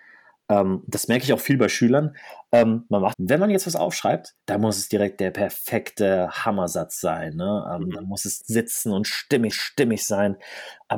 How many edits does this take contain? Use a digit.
4